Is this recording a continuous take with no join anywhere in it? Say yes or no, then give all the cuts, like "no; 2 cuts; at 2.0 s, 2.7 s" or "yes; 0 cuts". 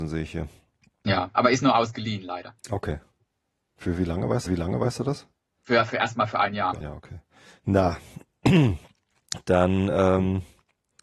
no; 3 cuts; at 4.5 s, 6.8 s, 7.5 s